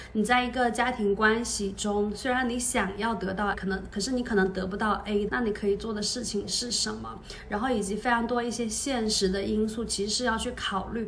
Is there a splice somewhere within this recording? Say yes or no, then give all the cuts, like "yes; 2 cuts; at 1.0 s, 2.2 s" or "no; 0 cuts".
yes; 2 cuts; at 3.5 s, 5.3 s